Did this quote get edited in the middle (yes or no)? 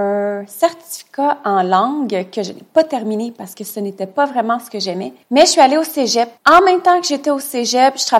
yes